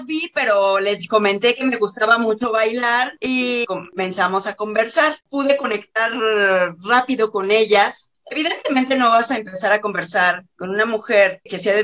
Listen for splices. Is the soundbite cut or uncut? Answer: cut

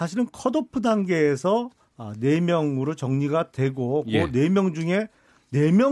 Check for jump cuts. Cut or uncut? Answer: uncut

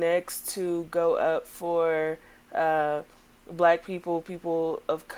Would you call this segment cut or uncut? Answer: uncut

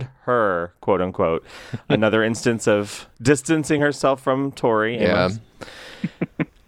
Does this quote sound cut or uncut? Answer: uncut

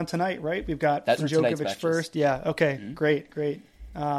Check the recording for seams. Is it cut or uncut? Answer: cut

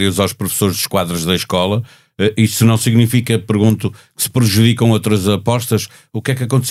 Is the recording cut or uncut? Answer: uncut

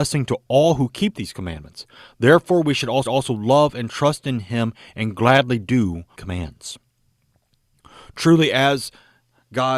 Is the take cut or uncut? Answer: cut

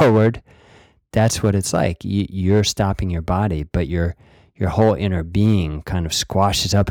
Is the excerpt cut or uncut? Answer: uncut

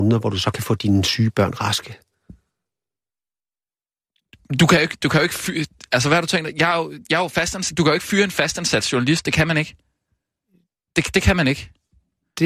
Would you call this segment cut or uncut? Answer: uncut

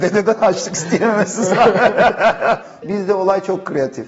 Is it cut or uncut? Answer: cut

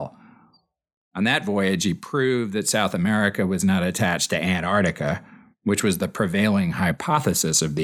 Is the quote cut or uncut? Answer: uncut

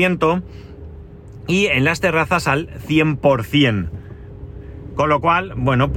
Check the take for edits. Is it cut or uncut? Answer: uncut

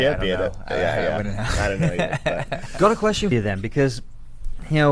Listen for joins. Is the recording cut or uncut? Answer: cut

